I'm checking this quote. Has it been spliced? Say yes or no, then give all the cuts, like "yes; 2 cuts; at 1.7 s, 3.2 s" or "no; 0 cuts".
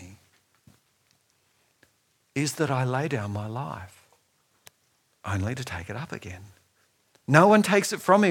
no; 0 cuts